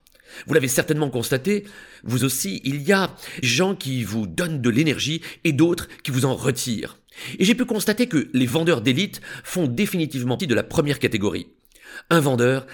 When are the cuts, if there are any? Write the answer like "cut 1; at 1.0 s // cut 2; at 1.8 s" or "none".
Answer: cut 1; at 3.4 s // cut 2; at 10.4 s